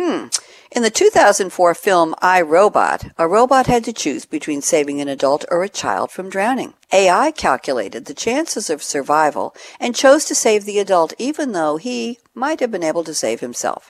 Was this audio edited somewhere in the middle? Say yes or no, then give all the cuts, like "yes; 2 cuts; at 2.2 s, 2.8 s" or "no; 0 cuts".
yes; 1 cut; at 6.8 s